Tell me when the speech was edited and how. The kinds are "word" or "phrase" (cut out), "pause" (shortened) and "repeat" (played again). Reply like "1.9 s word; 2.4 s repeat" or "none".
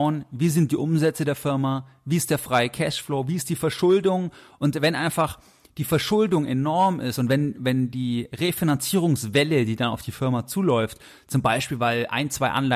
none